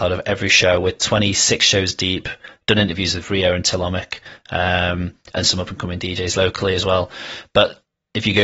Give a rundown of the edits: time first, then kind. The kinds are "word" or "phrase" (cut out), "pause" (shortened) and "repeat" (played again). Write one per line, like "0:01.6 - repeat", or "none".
none